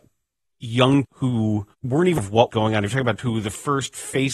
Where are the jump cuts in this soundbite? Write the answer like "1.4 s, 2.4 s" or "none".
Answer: 1.0 s, 1.7 s, 2.2 s, 2.5 s, 3.2 s